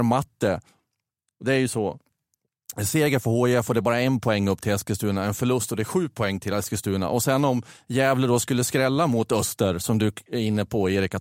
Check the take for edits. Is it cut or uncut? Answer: uncut